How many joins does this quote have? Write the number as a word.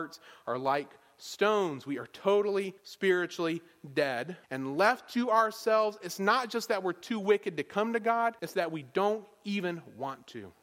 three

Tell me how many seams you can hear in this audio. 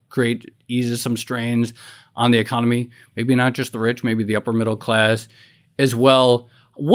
zero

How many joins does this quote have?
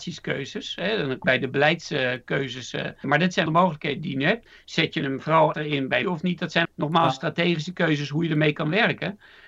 six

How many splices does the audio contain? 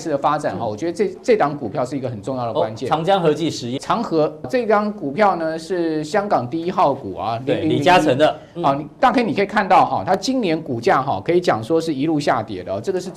two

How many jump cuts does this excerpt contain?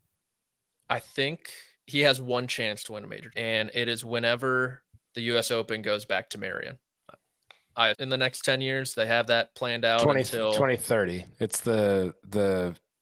four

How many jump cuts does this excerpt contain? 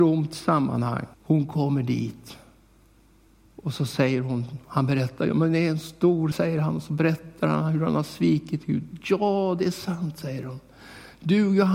three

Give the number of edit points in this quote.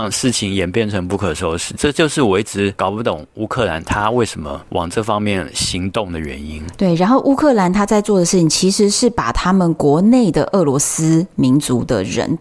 zero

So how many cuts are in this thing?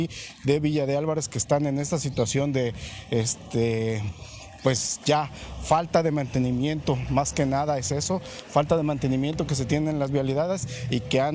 zero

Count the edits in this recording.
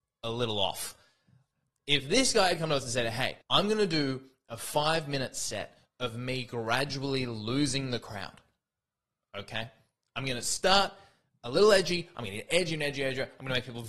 one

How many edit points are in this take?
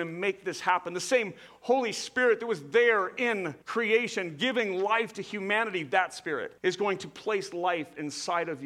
two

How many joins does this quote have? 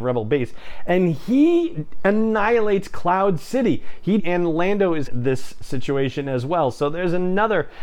two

